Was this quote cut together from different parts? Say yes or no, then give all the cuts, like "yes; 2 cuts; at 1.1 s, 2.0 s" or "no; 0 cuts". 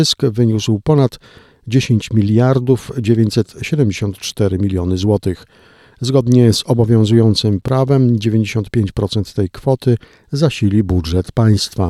no; 0 cuts